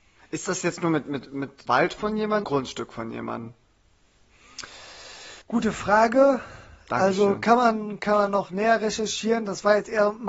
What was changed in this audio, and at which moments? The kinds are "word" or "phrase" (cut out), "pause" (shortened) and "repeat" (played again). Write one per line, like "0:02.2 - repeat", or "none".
0:01.7 - word
0:02.4 - phrase
0:05.4 - pause